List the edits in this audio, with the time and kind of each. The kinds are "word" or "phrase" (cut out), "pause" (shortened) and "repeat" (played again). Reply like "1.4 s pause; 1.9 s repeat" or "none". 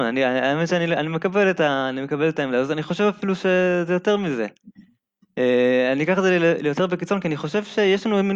none